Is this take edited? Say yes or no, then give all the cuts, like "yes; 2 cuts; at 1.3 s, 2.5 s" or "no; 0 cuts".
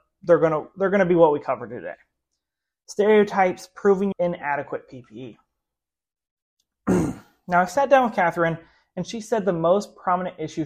yes; 1 cut; at 4.1 s